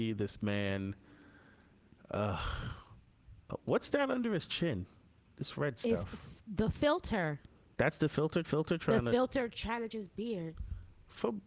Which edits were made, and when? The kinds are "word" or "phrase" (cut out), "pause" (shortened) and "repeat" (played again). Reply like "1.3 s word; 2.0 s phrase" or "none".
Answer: 8.4 s repeat; 9.9 s word